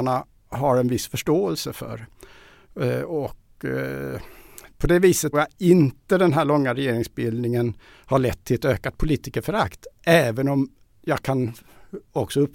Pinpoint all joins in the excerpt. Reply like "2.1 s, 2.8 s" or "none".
5.3 s

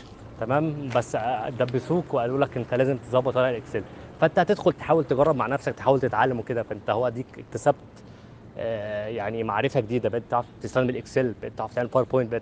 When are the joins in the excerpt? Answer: none

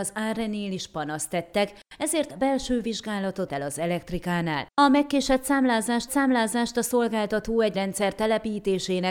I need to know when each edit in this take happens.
2.3 s, 3.5 s, 6.1 s, 7.7 s

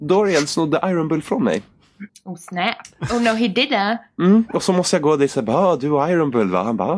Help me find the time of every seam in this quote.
2.1 s

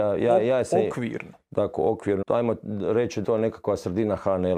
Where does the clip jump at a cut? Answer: 2.2 s, 3.2 s

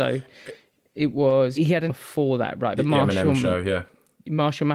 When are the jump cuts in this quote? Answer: 1.6 s, 1.9 s, 2.8 s

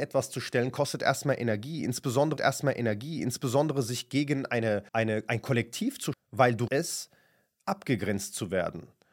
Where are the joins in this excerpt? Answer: 2.4 s, 4.9 s, 6.1 s, 6.7 s

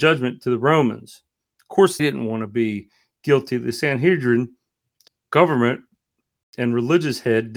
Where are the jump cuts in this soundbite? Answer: 2.0 s, 5.1 s

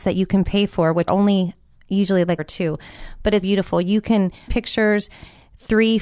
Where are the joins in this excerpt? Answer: 1.1 s, 2.4 s, 3.4 s, 4.5 s

